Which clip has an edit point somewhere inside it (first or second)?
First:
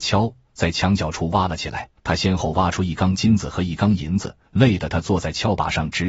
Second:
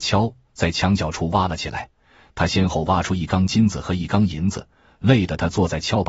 first